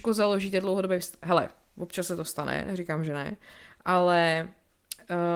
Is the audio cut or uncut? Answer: uncut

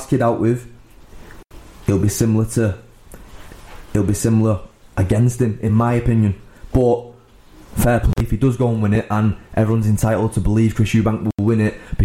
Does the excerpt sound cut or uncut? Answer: uncut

